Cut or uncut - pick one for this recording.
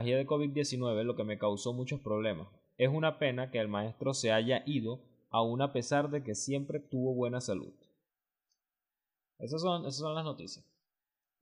uncut